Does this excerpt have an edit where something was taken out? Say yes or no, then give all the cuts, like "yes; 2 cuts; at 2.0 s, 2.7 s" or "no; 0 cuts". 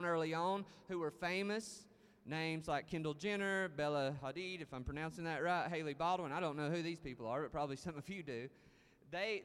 no; 0 cuts